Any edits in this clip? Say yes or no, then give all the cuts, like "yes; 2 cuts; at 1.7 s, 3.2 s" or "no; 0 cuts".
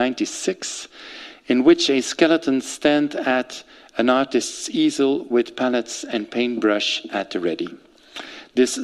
no; 0 cuts